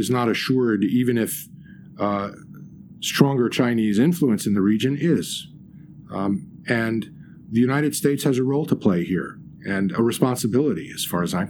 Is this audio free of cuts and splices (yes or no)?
yes